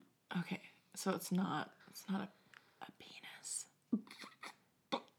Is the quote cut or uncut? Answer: cut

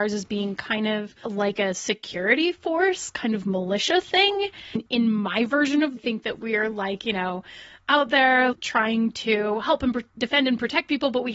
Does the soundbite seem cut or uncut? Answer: cut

